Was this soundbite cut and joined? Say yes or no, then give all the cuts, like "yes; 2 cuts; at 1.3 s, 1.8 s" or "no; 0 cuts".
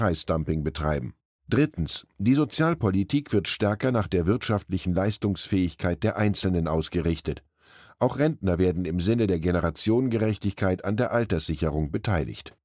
no; 0 cuts